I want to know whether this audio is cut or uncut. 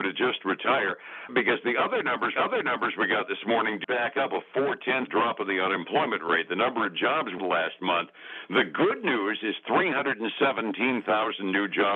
cut